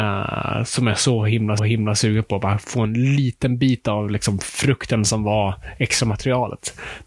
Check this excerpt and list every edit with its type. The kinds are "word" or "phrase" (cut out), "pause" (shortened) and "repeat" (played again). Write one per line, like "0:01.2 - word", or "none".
0:01.6 - repeat